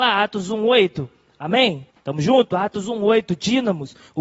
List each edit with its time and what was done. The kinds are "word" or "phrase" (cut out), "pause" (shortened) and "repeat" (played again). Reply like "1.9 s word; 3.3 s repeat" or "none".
1.9 s pause

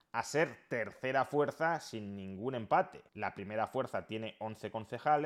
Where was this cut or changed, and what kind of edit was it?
3.1 s pause

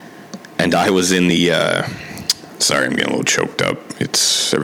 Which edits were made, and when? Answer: none

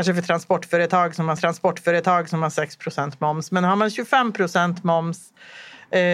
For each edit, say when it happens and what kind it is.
1.4 s repeat

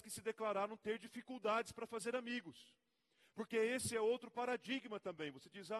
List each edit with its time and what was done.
none

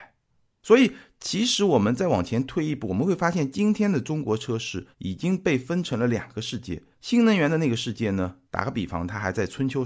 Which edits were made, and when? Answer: 4.9 s pause; 6.9 s pause; 8.4 s pause

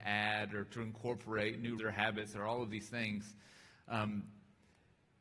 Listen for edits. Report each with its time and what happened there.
1.8 s word

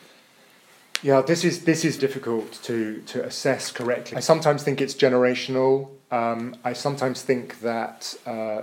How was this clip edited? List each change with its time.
2.0 s word; 4.1 s word

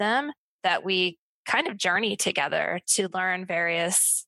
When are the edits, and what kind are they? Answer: none

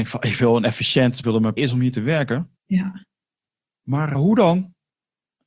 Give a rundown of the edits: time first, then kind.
1.2 s phrase; 1.6 s phrase; 2.6 s pause; 4.1 s word

